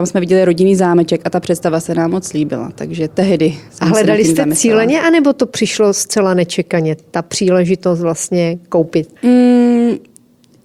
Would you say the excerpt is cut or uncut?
cut